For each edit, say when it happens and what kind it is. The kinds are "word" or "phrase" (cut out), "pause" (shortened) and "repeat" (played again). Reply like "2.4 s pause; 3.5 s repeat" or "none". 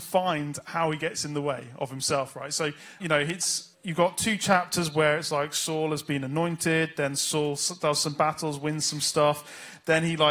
3.0 s word; 3.7 s pause